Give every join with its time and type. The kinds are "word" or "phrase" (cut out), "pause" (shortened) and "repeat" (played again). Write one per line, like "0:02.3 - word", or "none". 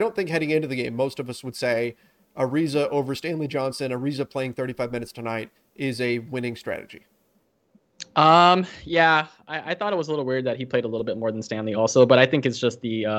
none